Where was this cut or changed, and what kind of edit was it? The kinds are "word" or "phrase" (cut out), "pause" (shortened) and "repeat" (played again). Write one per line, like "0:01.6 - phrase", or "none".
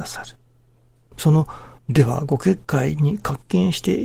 0:01.8 - pause